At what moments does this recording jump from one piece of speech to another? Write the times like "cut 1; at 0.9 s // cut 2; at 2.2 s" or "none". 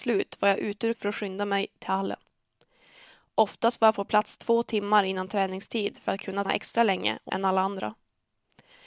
cut 1; at 0.9 s // cut 2; at 6.4 s // cut 3; at 7.3 s